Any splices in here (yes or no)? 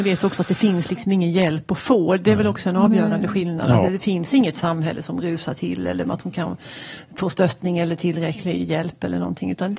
no